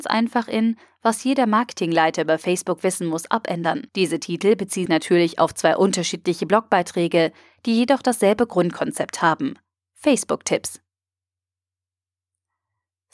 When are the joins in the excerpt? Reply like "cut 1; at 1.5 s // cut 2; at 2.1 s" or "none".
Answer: cut 1; at 3.9 s // cut 2; at 4.9 s